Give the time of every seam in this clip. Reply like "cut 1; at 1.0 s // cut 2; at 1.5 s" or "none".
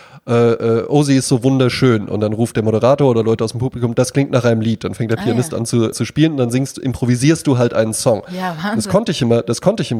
cut 1; at 5.9 s

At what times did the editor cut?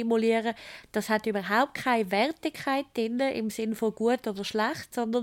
none

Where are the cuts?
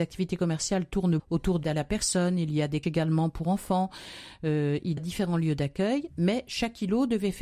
cut 1; at 1.2 s // cut 2; at 1.6 s // cut 3; at 2.8 s // cut 4; at 5.0 s

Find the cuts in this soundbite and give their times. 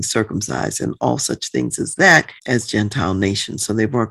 cut 1; at 2.4 s

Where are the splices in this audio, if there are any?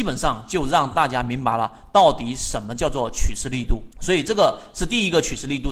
cut 1; at 3.9 s

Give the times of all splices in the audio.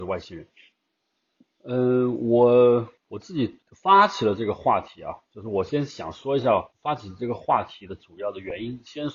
cut 1; at 3.0 s // cut 2; at 3.6 s // cut 3; at 6.7 s

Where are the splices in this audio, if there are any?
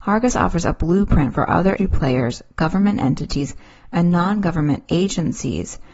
cut 1; at 1.8 s

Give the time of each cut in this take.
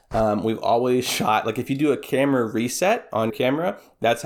cut 1; at 3.3 s

